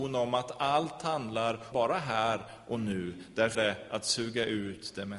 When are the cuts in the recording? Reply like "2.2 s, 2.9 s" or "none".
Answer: 1.7 s, 3.5 s